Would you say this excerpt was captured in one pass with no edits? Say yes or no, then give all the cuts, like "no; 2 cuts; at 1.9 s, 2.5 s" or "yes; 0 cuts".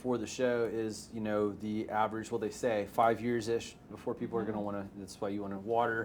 no; 2 cuts; at 2.9 s, 3.9 s